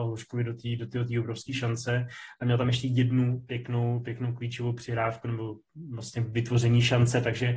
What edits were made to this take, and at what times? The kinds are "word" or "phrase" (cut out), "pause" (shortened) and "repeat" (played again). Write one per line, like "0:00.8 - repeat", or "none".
none

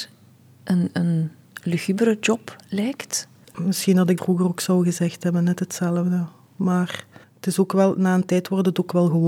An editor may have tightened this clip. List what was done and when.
0:03.4 - pause
0:04.2 - word
0:07.2 - pause

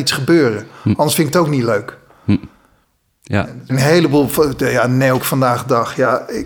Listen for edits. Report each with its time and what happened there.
0:03.7 - word
0:05.2 - word

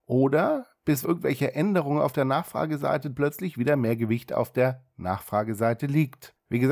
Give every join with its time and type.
0:01.0 - word
0:03.1 - word

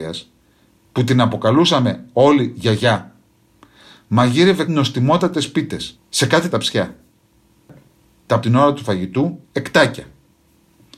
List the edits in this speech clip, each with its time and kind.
0:04.7 - word
0:05.9 - pause
0:06.5 - word
0:08.4 - phrase
0:09.4 - pause

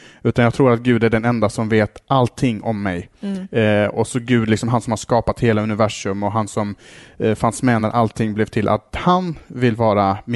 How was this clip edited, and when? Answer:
none

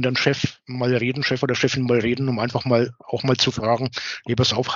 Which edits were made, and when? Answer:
none

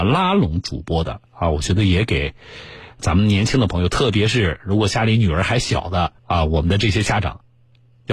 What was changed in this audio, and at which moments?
0:01.3 - pause
0:03.0 - word
0:06.2 - pause

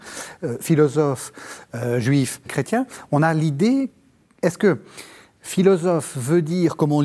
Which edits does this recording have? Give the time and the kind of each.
0:02.5 - word

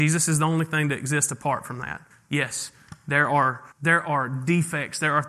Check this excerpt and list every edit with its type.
0:02.1 - pause
0:03.7 - pause

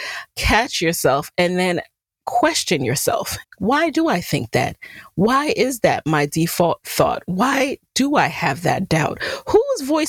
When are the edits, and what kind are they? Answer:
0:03.4 - phrase

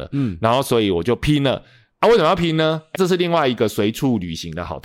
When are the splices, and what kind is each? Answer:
0:02.9 - word

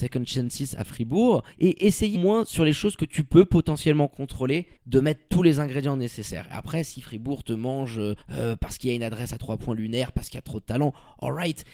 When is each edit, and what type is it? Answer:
0:01.5 - pause
0:02.1 - word
0:04.8 - pause
0:08.2 - pause

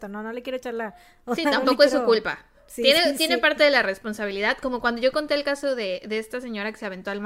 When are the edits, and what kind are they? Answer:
none

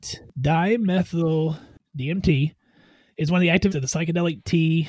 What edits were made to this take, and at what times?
0:01.8 - word
0:03.7 - word

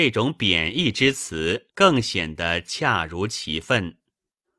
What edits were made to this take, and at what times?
0:01.7 - pause

